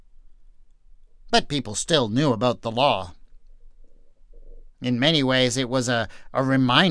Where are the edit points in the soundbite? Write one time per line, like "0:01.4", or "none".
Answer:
none